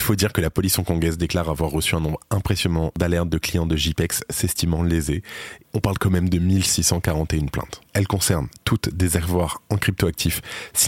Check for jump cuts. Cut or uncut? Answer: cut